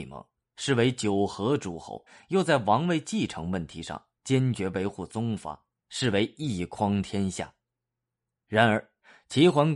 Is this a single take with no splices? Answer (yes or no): no